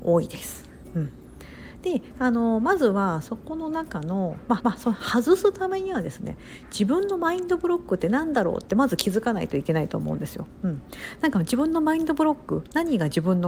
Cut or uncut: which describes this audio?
cut